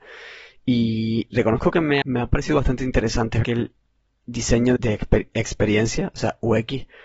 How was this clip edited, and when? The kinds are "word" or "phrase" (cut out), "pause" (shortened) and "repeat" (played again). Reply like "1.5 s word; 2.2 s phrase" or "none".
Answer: 2.0 s word; 3.4 s word; 4.8 s word